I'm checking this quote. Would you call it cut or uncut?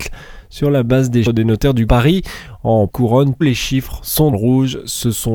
cut